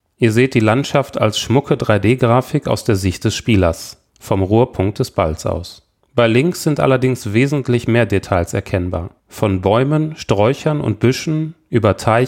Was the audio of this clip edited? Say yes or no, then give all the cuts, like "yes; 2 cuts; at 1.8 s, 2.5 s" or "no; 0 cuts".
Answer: yes; 3 cuts; at 4.1 s, 6.0 s, 9.2 s